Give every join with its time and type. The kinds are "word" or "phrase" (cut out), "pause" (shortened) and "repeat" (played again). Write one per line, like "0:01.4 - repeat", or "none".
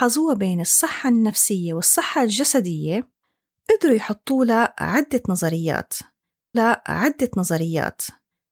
0:06.5 - repeat